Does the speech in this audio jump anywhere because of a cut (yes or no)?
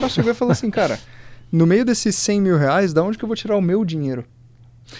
no